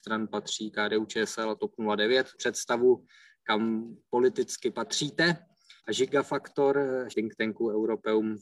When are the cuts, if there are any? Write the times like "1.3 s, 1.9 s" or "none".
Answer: 2.3 s, 5.8 s, 7.1 s